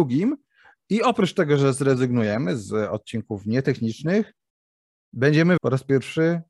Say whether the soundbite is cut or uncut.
cut